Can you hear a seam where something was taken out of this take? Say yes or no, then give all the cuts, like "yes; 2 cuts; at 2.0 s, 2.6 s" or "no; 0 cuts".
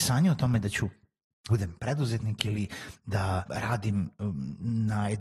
yes; 2 cuts; at 1.5 s, 3.4 s